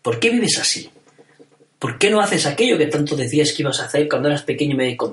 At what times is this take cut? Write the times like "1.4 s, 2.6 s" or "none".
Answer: none